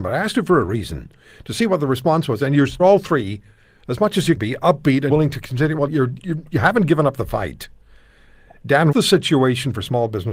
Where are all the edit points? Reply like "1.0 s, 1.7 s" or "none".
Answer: 2.8 s, 4.4 s, 5.1 s, 5.9 s, 6.2 s, 8.9 s